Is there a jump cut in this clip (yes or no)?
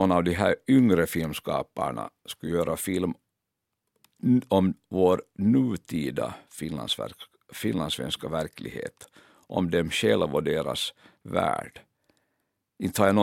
no